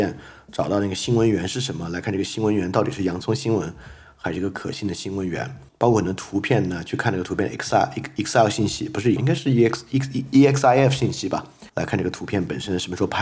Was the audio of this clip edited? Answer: yes; 3 cuts; at 5.7 s, 9.2 s, 11.7 s

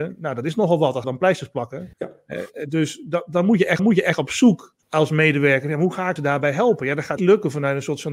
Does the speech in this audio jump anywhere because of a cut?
yes; 6 cuts; at 1.0 s, 1.9 s, 3.8 s, 4.8 s, 6.2 s, 7.2 s

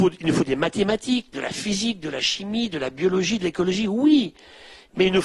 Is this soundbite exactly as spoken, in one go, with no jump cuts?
yes; 0 cuts

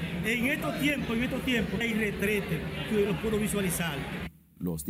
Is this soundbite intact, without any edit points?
no; 2 cuts; at 1.8 s, 3.1 s

